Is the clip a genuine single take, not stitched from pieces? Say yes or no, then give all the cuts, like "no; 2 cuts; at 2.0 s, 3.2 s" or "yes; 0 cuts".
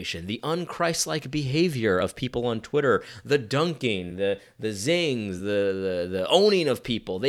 yes; 0 cuts